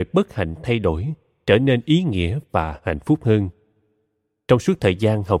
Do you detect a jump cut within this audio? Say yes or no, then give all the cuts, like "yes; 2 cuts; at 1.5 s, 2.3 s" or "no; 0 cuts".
no; 0 cuts